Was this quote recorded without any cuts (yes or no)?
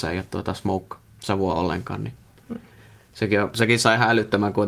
yes